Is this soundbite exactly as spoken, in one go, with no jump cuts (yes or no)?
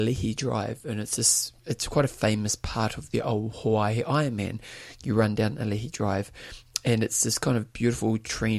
no